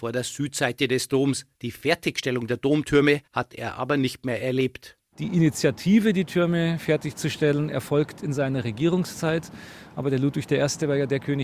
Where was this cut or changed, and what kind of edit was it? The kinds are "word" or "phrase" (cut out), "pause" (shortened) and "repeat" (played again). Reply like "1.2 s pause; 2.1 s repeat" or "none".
1.5 s pause; 3.3 s pause